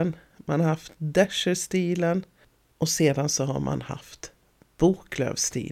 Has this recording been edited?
no; 0 cuts

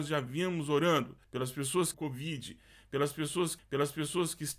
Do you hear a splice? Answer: yes; 3 cuts; at 1.2 s, 1.9 s, 3.6 s

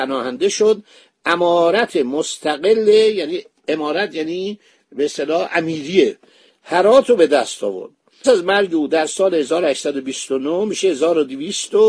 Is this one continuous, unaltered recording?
no; 1 cut; at 8.2 s

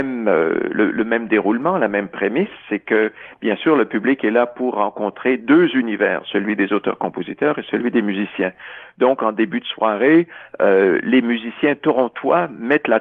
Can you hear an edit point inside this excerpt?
no; 0 cuts

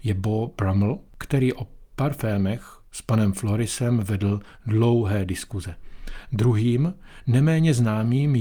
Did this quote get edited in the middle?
yes; 1 cut; at 1.1 s

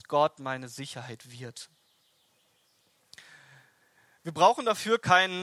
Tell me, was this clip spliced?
no; 0 cuts

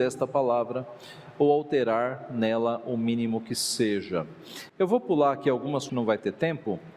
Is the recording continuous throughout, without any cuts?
no; 1 cut; at 5.9 s

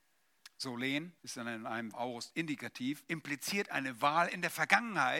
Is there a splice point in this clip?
yes; 2 cuts; at 1.2 s, 1.9 s

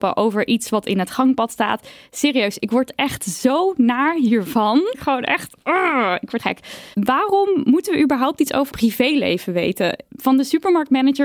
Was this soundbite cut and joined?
yes; 4 cuts; at 4.9 s, 6.4 s, 6.9 s, 8.7 s

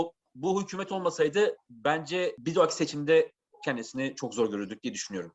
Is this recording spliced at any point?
no; 0 cuts

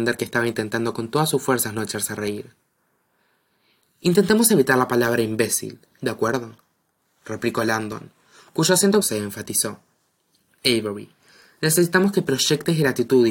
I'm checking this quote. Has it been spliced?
yes; 1 cut; at 9.0 s

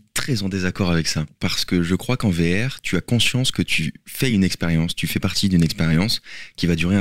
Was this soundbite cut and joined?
no; 0 cuts

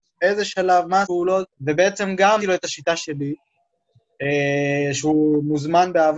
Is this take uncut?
no; 3 cuts; at 1.0 s, 1.5 s, 2.4 s

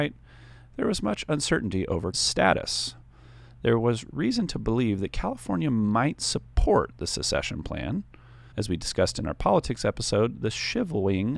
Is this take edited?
yes; 2 cuts; at 2.1 s, 8.5 s

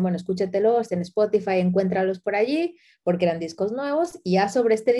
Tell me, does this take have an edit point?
no; 0 cuts

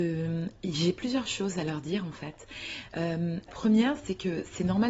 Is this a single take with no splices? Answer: no; 1 cut; at 3.5 s

